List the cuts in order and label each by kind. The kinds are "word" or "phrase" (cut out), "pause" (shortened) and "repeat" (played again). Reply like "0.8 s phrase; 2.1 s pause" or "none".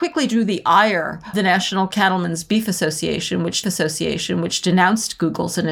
1.3 s word; 3.6 s repeat

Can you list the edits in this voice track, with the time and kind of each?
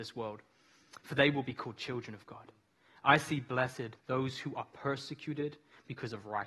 4.0 s pause

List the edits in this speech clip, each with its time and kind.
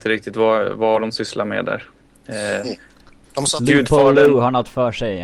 none

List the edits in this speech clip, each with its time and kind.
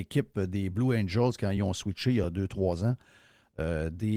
none

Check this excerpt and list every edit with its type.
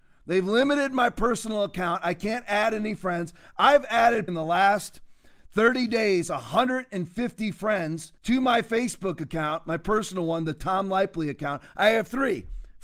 4.3 s word; 8.2 s pause

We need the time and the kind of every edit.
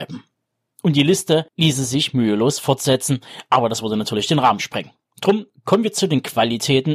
none

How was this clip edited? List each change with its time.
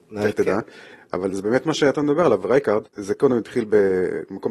2.9 s pause

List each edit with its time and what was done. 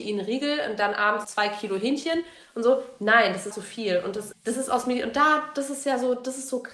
1.2 s word; 3.5 s word; 4.3 s word

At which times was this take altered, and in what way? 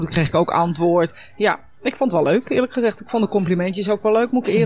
none

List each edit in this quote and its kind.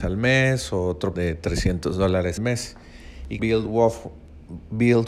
1.2 s word; 2.4 s word; 3.4 s word

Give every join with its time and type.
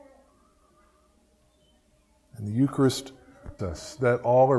3.6 s word

